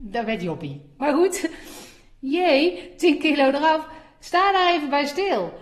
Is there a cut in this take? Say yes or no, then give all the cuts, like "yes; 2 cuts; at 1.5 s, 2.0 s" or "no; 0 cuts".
no; 0 cuts